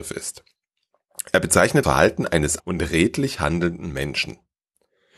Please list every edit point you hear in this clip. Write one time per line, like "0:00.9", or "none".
0:01.8
0:02.6